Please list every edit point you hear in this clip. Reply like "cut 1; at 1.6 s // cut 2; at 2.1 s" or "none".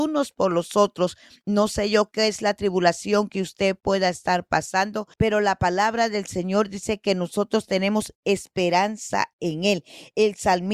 cut 1; at 5.1 s